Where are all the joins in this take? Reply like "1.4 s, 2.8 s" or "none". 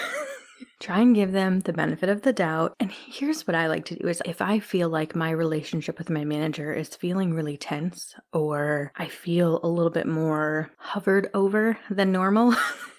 none